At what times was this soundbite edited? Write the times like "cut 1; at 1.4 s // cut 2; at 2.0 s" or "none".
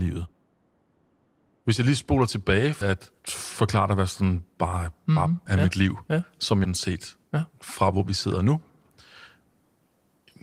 cut 1; at 2.8 s // cut 2; at 3.2 s // cut 3; at 5.5 s // cut 4; at 6.6 s